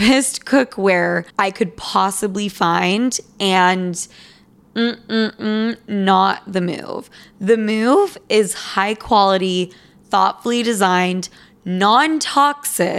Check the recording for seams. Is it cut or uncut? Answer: cut